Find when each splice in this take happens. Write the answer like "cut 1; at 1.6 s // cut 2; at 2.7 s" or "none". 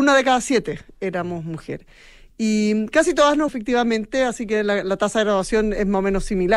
cut 1; at 3.5 s

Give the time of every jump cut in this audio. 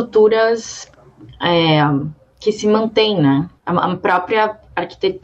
cut 1; at 3.6 s

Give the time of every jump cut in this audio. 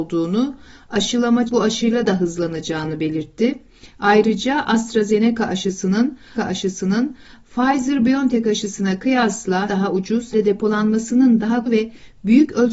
cut 1; at 1.5 s // cut 2; at 2.1 s // cut 3; at 6.4 s // cut 4; at 9.7 s // cut 5; at 10.3 s // cut 6; at 11.7 s

